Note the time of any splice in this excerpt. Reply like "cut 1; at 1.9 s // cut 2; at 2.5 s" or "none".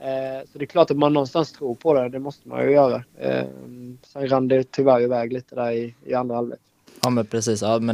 cut 1; at 3.1 s // cut 2; at 6.9 s

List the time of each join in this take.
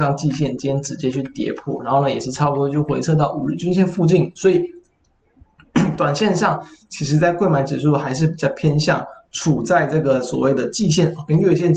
none

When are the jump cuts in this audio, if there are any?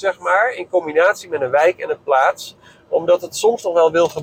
none

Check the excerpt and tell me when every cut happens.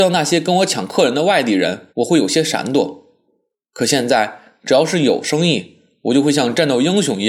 cut 1; at 1.9 s

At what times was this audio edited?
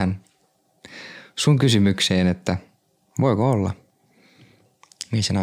none

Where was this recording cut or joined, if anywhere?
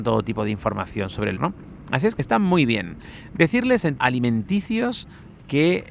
cut 1; at 1.4 s // cut 2; at 2.2 s // cut 3; at 4.0 s

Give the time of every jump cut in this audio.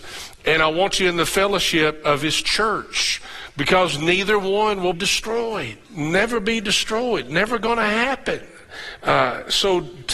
cut 1; at 4.9 s // cut 2; at 5.8 s

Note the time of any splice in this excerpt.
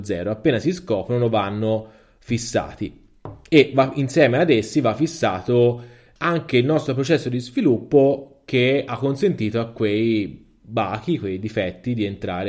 none

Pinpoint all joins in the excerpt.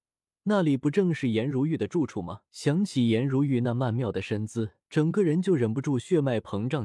cut 1; at 2.5 s // cut 2; at 4.8 s

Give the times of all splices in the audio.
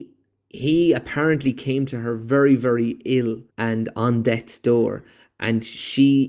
cut 1; at 3.5 s

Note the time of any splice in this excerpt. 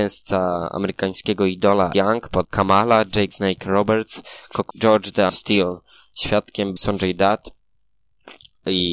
cut 1; at 1.9 s // cut 2; at 2.4 s // cut 3; at 3.3 s // cut 4; at 4.7 s // cut 5; at 5.3 s // cut 6; at 6.8 s

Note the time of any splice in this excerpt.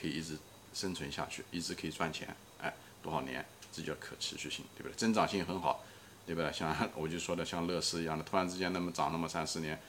none

